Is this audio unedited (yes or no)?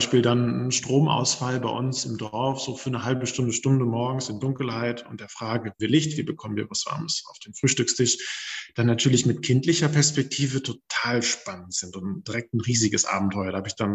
no